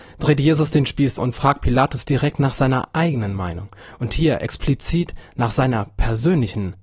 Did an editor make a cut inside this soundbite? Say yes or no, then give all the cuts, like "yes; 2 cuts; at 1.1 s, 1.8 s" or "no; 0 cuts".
yes; 1 cut; at 1.2 s